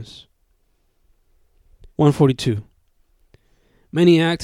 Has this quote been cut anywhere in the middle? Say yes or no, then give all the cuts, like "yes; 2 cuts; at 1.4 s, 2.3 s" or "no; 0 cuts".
yes; 1 cut; at 1.9 s